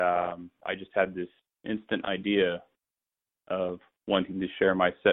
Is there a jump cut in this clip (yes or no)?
yes